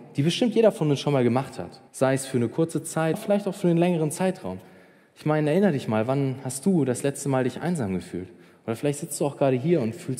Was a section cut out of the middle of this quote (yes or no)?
yes